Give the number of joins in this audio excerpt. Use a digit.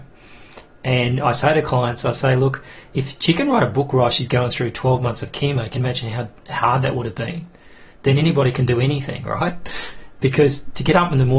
0